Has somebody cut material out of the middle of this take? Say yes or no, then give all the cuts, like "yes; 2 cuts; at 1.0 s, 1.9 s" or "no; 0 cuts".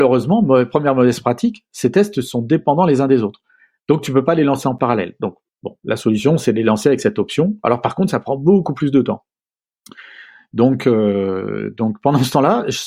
no; 0 cuts